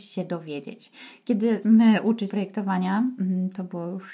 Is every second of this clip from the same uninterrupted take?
no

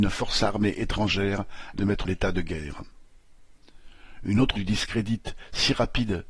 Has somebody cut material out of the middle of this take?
yes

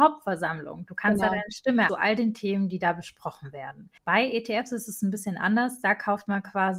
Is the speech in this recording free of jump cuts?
no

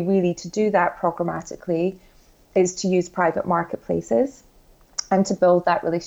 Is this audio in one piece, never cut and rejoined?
yes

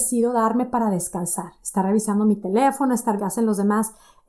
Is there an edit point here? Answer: yes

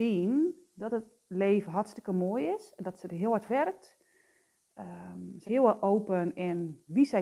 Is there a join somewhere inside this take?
yes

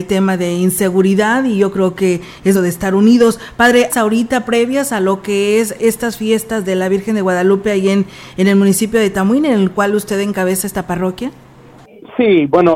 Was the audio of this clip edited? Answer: yes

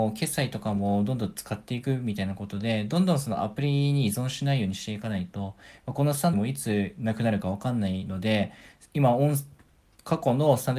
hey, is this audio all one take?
no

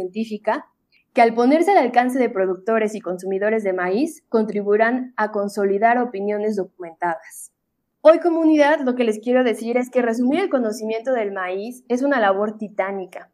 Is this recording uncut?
yes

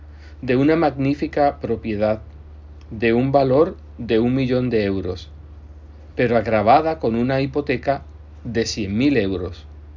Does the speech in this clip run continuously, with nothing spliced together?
yes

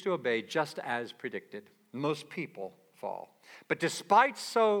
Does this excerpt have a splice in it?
no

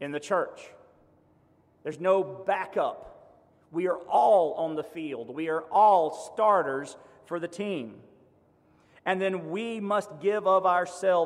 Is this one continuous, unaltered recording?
yes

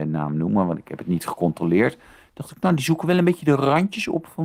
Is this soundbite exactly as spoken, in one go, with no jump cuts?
yes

